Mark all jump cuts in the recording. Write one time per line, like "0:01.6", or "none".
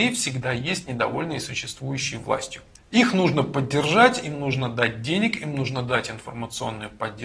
none

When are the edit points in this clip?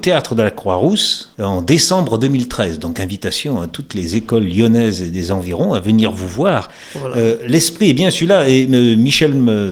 none

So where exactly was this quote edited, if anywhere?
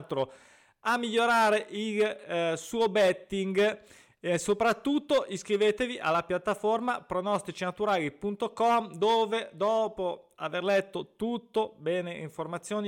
none

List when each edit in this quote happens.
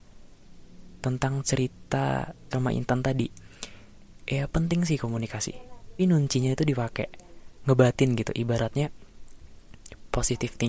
0:02.5
0:06.0

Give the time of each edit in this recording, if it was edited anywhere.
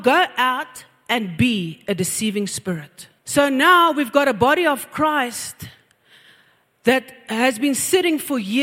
0:03.2

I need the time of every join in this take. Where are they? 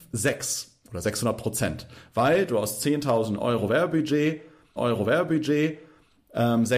0:04.8

